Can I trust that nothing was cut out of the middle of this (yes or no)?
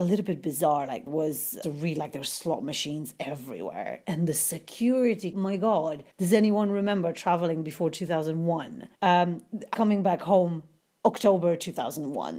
no